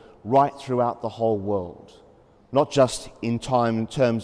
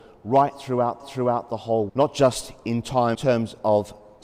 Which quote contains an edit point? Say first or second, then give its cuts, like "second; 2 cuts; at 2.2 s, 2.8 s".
second; 3 cuts; at 1.0 s, 1.9 s, 3.1 s